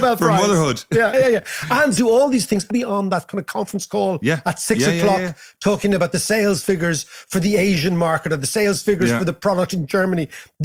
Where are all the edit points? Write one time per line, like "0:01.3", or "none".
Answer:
0:01.1
0:02.0
0:02.7